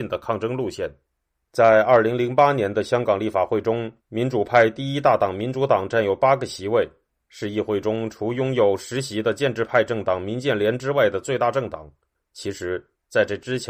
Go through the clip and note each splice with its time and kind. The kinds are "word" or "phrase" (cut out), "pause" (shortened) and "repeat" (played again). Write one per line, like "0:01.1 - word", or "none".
0:04.0 - pause